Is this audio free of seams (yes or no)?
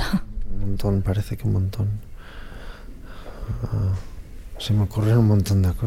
yes